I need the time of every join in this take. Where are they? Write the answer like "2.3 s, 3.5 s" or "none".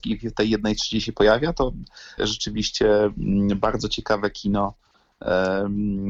2.2 s